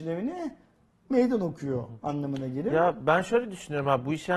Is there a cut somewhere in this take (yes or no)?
no